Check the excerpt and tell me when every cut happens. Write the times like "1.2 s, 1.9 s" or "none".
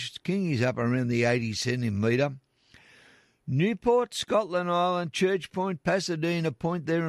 none